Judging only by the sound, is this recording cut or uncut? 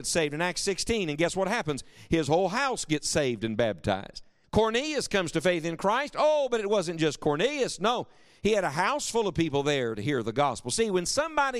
cut